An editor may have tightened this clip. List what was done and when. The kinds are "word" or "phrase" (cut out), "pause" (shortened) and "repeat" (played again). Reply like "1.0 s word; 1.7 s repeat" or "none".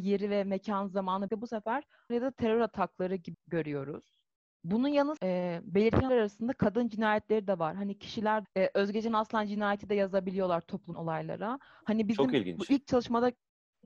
1.3 s word; 2.1 s word; 3.3 s word; 5.2 s word; 6.1 s word; 8.4 s word; 10.9 s word

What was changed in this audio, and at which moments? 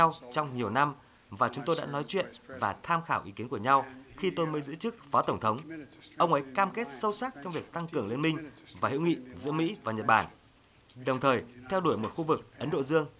none

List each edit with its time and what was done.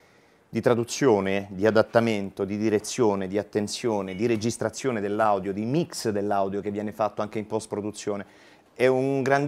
none

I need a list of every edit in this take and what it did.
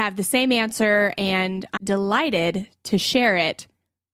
1.8 s word

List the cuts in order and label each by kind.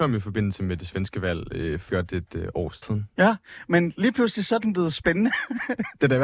1.9 s word; 2.8 s word

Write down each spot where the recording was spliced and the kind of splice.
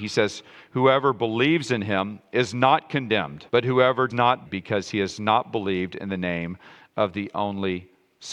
3.5 s pause; 4.1 s word; 4.4 s phrase

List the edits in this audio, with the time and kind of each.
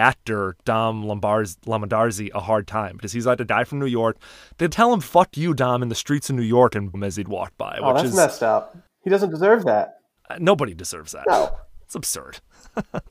4.7 s word; 6.9 s word; 10.2 s pause; 11.8 s pause

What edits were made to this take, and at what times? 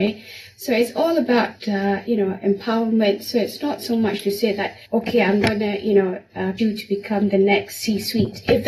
2.1 s word; 4.8 s pause; 6.6 s word

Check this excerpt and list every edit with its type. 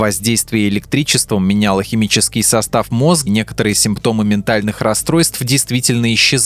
3.3 s word

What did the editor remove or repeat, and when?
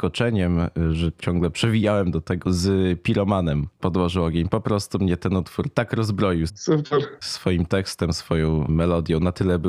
1.2 s word; 2.4 s word; 3.8 s word; 6.5 s word

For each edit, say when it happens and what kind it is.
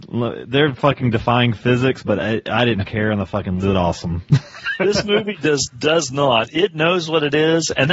3.6 s phrase

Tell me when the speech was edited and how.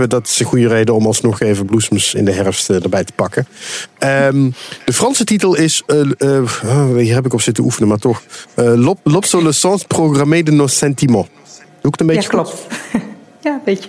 11.6 s pause

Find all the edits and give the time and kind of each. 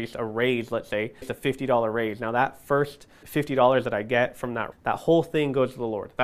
1.2 s word; 3.2 s word; 4.7 s word

